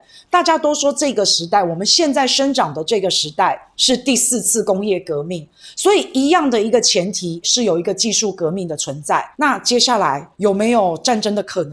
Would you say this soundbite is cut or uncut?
cut